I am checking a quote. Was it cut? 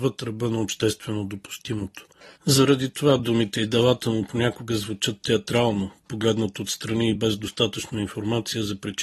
no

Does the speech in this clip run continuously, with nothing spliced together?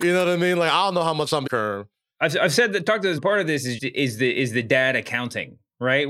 no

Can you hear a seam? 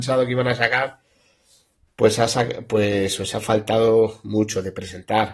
no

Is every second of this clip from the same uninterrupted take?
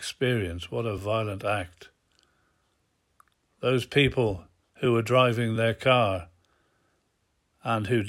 yes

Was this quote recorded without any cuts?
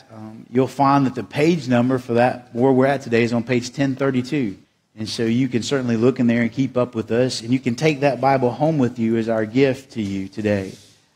no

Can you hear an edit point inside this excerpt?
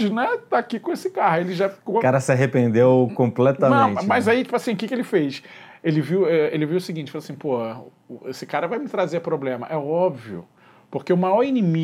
no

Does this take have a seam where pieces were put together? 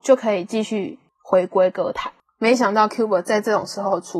no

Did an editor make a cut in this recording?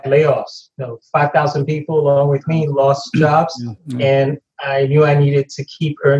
yes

